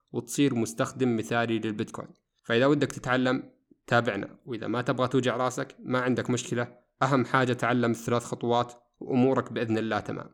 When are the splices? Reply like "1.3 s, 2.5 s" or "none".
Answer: none